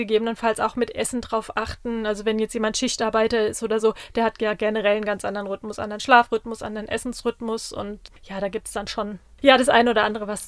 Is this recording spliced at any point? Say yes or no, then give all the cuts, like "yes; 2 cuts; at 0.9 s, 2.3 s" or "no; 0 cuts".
no; 0 cuts